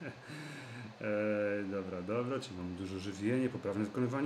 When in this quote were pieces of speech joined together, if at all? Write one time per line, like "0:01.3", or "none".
none